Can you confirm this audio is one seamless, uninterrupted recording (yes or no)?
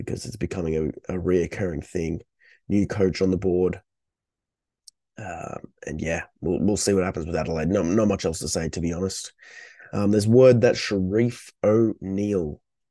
yes